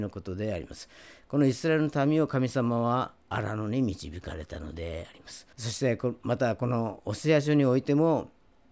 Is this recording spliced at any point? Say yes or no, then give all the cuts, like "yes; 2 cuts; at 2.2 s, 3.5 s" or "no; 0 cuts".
yes; 2 cuts; at 3.2 s, 5.5 s